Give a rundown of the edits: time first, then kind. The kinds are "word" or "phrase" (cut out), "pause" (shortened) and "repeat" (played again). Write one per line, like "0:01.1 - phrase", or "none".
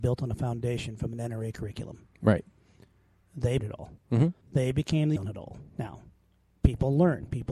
0:03.6 - word
0:04.4 - pause
0:05.2 - word
0:05.7 - pause